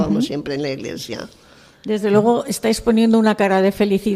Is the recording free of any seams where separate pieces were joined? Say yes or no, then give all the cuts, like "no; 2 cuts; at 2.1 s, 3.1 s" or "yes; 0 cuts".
yes; 0 cuts